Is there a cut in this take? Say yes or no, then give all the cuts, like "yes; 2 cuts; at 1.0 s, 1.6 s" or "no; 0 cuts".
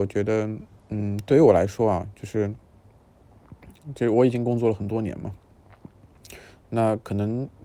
no; 0 cuts